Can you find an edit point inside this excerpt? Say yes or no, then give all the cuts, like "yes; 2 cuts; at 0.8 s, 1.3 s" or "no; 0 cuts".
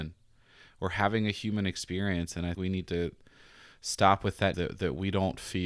yes; 2 cuts; at 2.5 s, 4.5 s